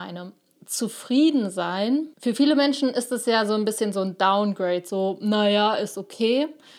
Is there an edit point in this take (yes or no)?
yes